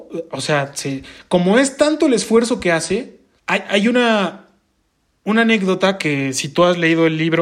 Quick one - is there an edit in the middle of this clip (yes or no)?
yes